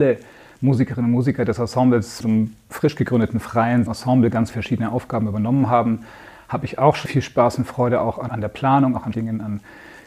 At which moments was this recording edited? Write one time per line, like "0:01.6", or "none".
0:02.2
0:03.9
0:04.5
0:07.0
0:08.3
0:09.1